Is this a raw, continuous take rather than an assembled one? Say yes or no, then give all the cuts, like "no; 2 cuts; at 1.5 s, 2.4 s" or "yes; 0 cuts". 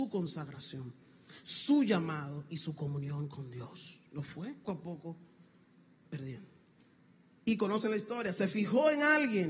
no; 2 cuts; at 4.1 s, 4.6 s